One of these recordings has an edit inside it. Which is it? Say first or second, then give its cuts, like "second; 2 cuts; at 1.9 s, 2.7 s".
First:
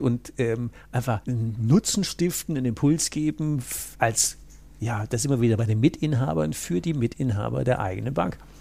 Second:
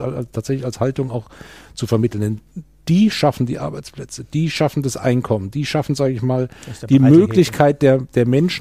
first; 2 cuts; at 1.2 s, 3.9 s